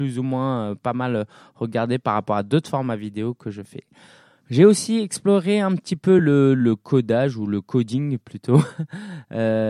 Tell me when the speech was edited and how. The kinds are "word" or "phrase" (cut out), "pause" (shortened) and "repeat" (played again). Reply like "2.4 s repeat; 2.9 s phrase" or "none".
none